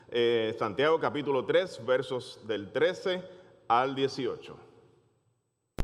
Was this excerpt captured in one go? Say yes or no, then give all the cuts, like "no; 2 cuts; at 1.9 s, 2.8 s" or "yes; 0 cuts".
yes; 0 cuts